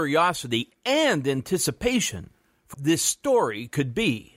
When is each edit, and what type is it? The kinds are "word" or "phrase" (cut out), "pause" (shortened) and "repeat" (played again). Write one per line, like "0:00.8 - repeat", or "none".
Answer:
0:02.7 - word